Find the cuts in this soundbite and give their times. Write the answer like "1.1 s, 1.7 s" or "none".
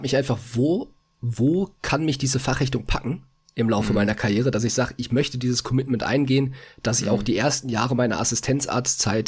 none